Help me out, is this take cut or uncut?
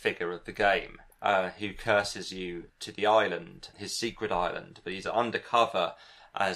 cut